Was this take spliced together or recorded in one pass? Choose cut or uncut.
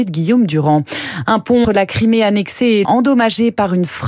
cut